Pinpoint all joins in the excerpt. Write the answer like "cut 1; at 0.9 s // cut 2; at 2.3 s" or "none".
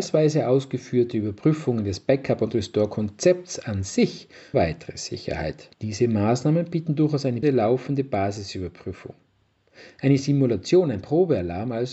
cut 1; at 4.5 s // cut 2; at 5.7 s // cut 3; at 7.4 s